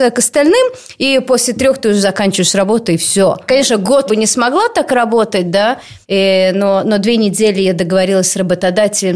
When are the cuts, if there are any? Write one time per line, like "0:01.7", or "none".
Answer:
0:04.1
0:06.0